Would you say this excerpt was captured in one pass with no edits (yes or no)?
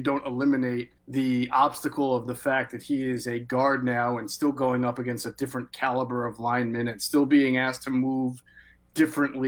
no